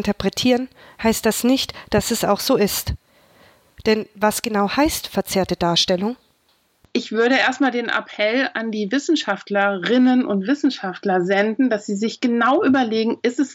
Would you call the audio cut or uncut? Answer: uncut